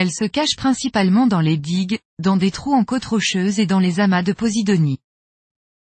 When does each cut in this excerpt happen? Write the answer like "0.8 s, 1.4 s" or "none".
none